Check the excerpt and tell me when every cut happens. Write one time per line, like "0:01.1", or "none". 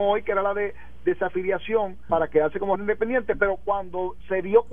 0:02.1
0:02.8